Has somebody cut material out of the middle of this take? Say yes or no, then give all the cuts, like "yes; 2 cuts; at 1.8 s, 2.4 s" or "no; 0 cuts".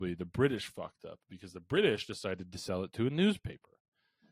no; 0 cuts